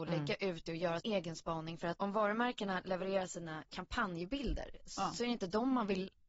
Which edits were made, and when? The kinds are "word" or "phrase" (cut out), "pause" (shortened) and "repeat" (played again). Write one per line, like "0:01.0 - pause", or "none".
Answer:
0:01.0 - word
0:02.0 - word